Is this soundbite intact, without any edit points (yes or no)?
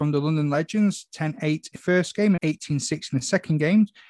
no